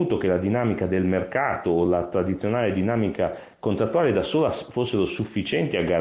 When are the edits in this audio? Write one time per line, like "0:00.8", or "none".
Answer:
none